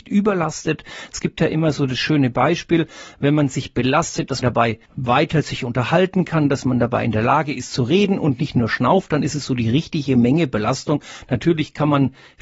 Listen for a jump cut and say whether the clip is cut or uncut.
cut